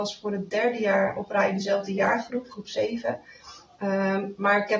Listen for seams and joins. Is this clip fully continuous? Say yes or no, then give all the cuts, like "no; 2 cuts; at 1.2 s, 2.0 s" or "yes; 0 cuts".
yes; 0 cuts